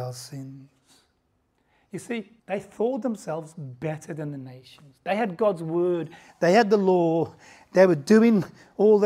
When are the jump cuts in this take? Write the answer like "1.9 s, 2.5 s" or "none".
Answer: 2.4 s